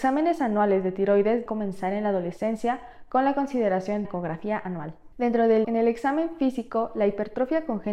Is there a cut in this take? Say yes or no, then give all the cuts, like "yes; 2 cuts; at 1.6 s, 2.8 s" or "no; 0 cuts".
yes; 4 cuts; at 1.5 s, 4.0 s, 5.1 s, 5.6 s